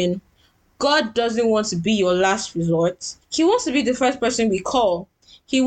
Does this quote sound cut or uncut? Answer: uncut